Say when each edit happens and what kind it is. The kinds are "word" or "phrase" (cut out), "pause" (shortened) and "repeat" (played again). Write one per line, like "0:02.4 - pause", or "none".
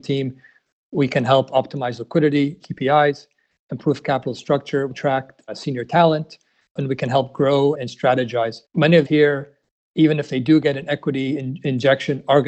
0:02.6 - word
0:07.7 - word
0:08.7 - pause
0:09.0 - phrase